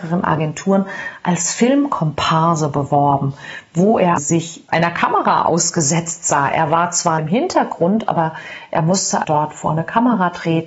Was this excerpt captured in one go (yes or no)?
no